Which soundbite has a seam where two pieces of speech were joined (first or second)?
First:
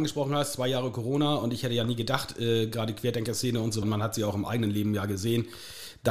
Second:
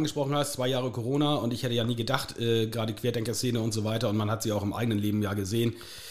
first